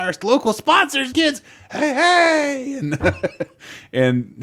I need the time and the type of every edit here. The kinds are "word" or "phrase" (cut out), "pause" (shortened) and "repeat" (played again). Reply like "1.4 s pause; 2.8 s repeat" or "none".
1.1 s phrase